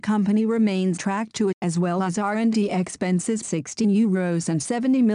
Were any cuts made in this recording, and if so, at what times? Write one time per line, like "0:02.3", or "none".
0:01.0
0:01.5
0:03.4
0:03.8